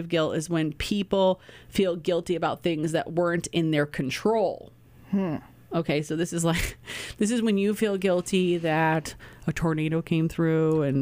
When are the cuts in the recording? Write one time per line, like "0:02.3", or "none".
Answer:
none